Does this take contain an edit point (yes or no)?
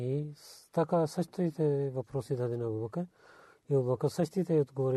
no